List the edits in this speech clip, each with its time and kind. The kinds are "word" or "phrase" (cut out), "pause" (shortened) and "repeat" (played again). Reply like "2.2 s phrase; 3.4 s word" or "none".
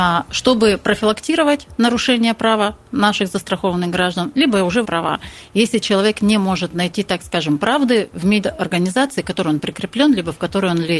4.8 s phrase